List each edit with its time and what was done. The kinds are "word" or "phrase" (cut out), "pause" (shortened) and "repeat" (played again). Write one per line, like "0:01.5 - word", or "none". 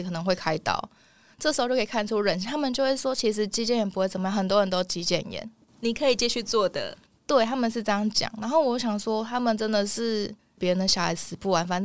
none